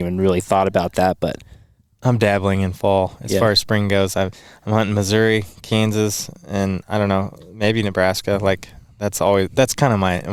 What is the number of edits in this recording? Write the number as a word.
zero